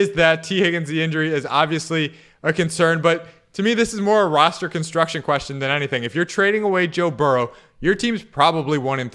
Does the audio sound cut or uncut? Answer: uncut